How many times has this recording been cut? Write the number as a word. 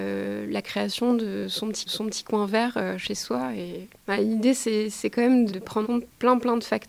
three